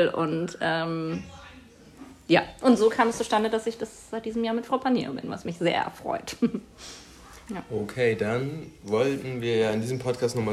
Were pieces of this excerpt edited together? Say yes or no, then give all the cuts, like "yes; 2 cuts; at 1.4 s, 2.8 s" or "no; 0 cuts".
no; 0 cuts